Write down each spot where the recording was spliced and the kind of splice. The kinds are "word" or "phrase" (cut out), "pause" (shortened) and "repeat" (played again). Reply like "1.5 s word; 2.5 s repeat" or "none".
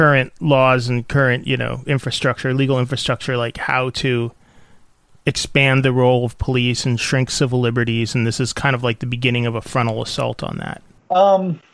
none